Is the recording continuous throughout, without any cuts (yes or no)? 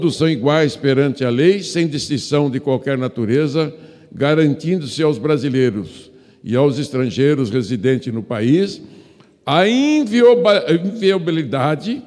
yes